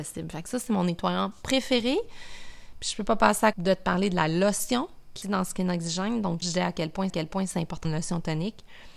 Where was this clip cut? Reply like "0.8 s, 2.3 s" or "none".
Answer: 3.5 s, 5.2 s, 6.4 s, 7.1 s, 7.8 s